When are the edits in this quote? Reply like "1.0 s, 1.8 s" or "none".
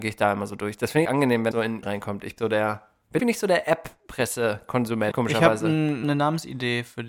1.0 s, 1.5 s, 1.8 s, 2.4 s, 3.2 s, 5.1 s, 6.0 s

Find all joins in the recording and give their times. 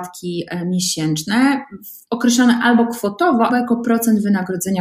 3.5 s

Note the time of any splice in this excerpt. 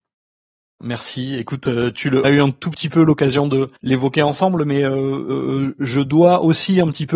2.2 s, 3.8 s

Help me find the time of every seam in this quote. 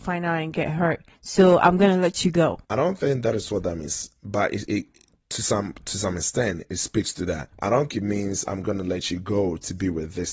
1.2 s, 2.6 s, 4.7 s, 6.7 s, 7.5 s, 7.9 s

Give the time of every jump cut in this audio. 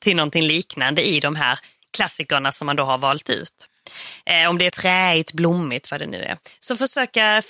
4.7 s

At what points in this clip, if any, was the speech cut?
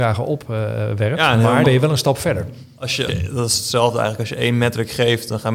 1.6 s, 3.1 s

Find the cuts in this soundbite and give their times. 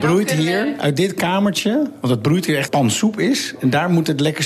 2.7 s

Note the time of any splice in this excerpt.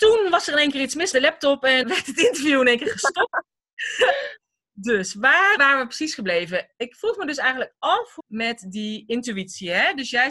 1.1 s, 1.8 s, 5.6 s, 8.2 s

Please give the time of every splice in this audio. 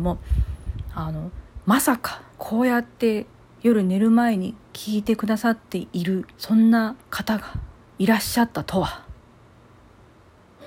2.3 s, 3.4 s, 6.3 s, 7.0 s, 7.8 s

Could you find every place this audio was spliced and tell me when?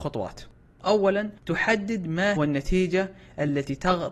1.4 s, 2.4 s

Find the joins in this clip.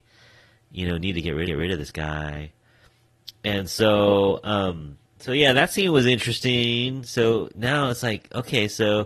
1.4 s

